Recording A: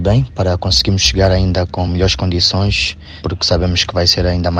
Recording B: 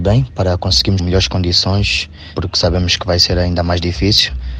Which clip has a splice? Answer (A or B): B